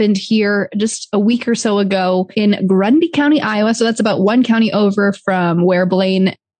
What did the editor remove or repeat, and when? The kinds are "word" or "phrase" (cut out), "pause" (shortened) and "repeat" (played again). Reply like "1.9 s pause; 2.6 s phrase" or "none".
none